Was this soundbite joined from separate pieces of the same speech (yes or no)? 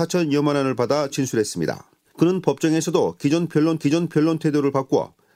yes